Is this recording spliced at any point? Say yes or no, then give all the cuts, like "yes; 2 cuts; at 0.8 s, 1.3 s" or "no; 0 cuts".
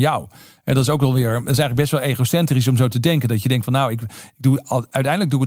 no; 0 cuts